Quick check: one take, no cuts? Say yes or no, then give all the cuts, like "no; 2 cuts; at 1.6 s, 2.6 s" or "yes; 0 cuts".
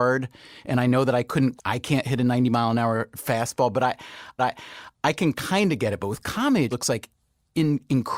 no; 3 cuts; at 1.6 s, 4.4 s, 6.7 s